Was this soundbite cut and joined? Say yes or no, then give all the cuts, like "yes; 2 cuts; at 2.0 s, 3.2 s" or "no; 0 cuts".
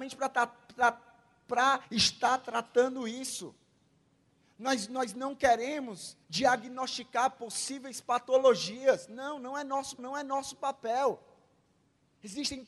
yes; 3 cuts; at 1.8 s, 6.2 s, 10.0 s